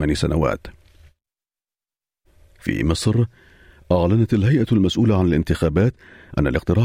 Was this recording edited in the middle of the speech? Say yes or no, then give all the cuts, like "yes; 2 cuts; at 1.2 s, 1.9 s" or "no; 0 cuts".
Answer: no; 0 cuts